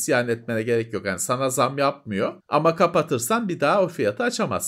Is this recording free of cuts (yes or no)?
no